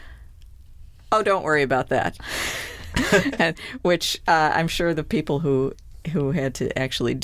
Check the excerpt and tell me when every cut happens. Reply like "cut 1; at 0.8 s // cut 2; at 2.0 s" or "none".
none